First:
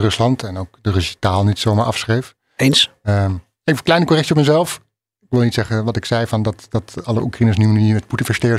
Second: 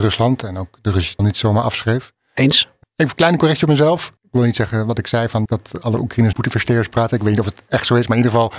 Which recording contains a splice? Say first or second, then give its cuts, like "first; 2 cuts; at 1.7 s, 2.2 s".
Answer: second; 5 cuts; at 1.2 s, 2.8 s, 4.2 s, 5.5 s, 6.3 s